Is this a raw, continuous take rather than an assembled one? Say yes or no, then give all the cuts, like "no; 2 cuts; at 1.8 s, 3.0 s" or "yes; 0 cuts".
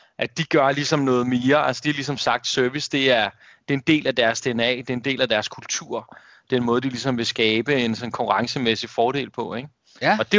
yes; 0 cuts